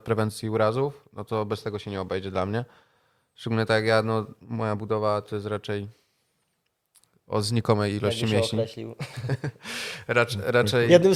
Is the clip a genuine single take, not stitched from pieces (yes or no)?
yes